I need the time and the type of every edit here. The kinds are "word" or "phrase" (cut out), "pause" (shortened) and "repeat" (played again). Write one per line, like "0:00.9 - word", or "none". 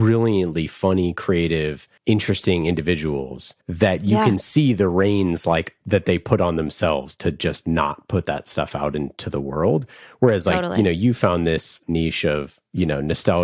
0:02.0 - pause
0:03.6 - pause
0:11.8 - word